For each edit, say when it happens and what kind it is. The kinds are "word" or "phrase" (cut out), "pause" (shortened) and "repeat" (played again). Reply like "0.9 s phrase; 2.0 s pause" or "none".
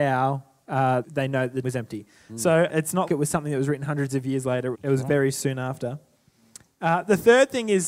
1.0 s word; 1.6 s word; 2.7 s word; 3.1 s word; 4.7 s word